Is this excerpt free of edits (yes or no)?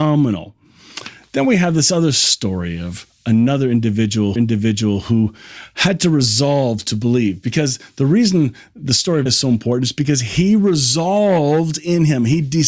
no